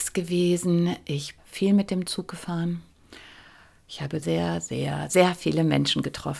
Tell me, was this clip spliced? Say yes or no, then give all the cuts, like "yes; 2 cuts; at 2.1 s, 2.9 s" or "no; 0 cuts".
yes; 3 cuts; at 1.4 s, 4.2 s, 5.1 s